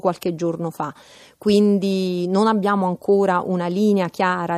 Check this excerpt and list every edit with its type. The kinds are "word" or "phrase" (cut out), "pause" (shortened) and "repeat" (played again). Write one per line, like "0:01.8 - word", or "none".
none